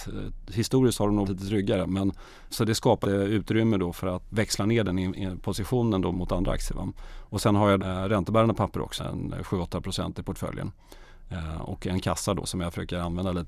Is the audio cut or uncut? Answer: cut